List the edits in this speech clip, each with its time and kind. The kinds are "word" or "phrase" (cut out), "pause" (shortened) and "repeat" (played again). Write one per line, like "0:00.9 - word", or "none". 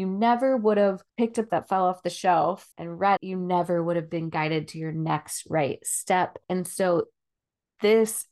0:01.1 - pause
0:01.5 - phrase
0:02.7 - pause
0:03.2 - word
0:06.4 - pause